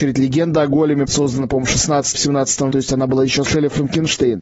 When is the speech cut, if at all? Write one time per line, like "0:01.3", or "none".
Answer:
0:01.0
0:02.1
0:02.7
0:03.4